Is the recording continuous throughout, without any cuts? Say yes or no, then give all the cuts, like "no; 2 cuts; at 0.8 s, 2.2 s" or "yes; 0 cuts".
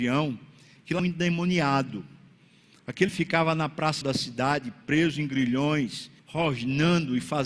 no; 4 cuts; at 1.0 s, 3.1 s, 4.0 s, 6.2 s